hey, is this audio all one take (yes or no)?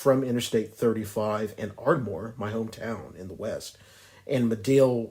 yes